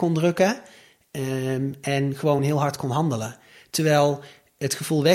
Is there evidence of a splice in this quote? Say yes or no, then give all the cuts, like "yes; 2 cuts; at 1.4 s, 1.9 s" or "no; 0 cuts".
no; 0 cuts